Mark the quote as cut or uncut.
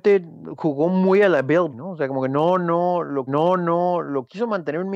cut